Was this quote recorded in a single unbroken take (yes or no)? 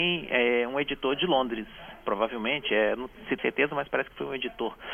no